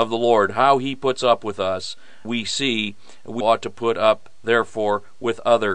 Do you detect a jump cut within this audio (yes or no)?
yes